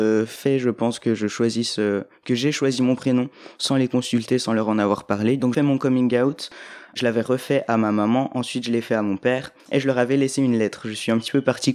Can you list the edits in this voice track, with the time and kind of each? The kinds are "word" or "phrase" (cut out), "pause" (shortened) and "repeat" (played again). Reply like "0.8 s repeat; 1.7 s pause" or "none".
5.5 s phrase; 9.6 s pause